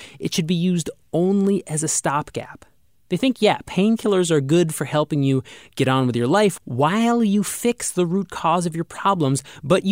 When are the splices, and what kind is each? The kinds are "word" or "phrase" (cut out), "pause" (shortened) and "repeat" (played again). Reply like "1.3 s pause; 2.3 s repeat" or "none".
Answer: none

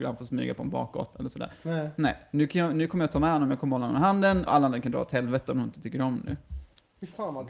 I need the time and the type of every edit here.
4.5 s word

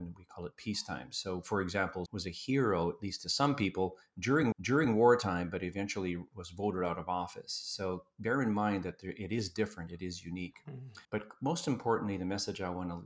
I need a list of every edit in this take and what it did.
2.1 s phrase; 4.5 s repeat; 11.0 s pause

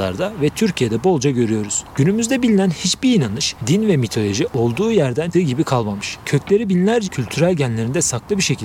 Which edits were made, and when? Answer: 5.3 s word; 7.0 s word

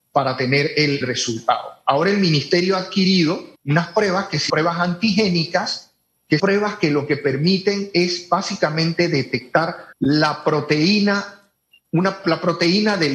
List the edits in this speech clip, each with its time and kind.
1.0 s word; 3.6 s pause; 4.5 s word; 6.4 s word; 9.9 s pause; 12.2 s word

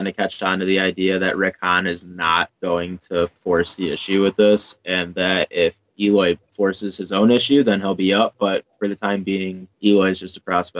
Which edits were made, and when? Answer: 2.6 s pause; 9.7 s pause

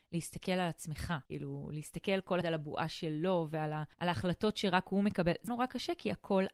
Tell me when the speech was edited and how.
1.2 s pause; 2.4 s word; 3.9 s pause; 5.5 s word

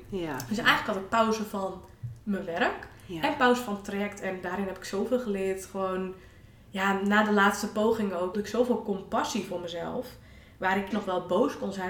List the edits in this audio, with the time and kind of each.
8.3 s word; 10.9 s word

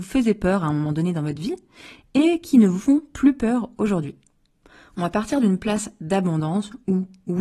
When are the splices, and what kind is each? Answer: none

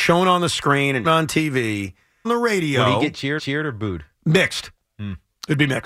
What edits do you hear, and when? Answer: 1.0 s word; 2.2 s phrase; 3.4 s repeat; 4.1 s pause

